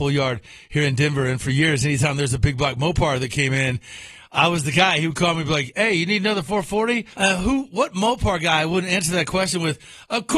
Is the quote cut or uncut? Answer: cut